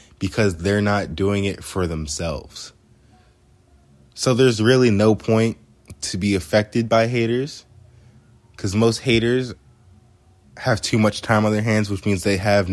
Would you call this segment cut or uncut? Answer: uncut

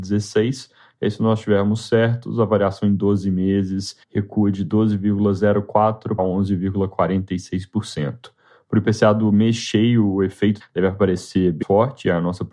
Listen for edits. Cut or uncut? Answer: cut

